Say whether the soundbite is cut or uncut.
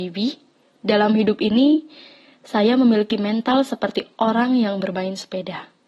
uncut